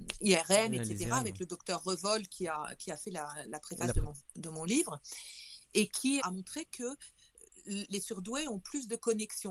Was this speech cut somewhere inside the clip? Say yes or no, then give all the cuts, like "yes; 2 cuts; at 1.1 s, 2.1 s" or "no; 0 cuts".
yes; 3 cuts; at 3.4 s, 6.2 s, 7.9 s